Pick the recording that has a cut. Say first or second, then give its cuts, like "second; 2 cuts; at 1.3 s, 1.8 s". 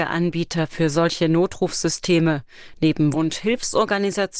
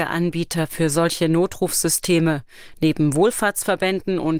first; 1 cut; at 3.1 s